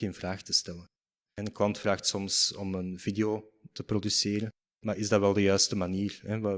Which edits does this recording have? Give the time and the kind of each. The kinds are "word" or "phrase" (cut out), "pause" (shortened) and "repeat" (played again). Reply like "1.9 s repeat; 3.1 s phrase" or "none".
none